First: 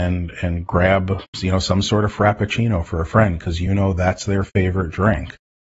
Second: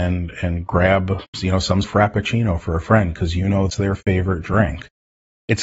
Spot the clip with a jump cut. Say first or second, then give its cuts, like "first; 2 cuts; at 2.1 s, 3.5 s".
second; 2 cuts; at 1.8 s, 3.7 s